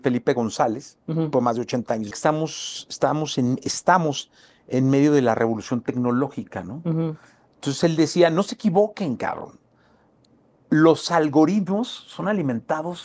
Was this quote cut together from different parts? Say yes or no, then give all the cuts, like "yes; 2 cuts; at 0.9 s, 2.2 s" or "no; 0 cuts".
yes; 2 cuts; at 1.3 s, 2.1 s